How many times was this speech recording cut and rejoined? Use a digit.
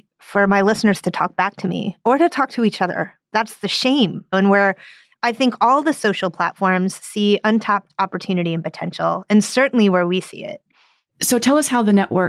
1